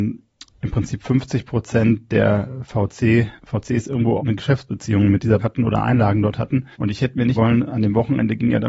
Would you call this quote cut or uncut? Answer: cut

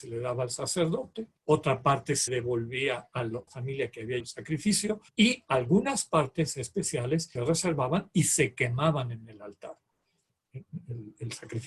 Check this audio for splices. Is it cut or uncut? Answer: cut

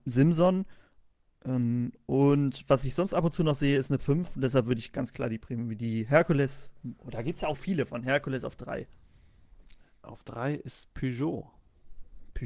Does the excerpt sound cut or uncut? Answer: cut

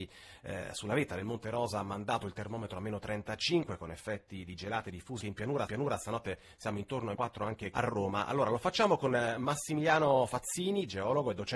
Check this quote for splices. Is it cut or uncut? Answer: cut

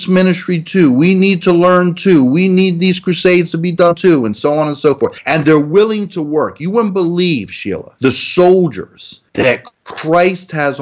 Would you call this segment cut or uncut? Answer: uncut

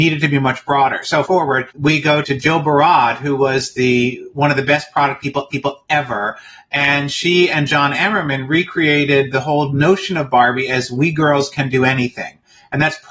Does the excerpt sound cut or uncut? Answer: cut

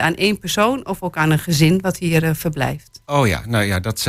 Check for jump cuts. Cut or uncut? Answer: uncut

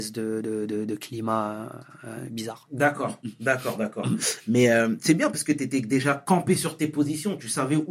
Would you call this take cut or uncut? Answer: uncut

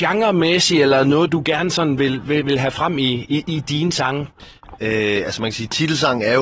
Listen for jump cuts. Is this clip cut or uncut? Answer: uncut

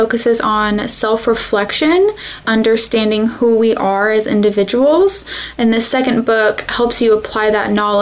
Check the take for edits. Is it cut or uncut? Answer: cut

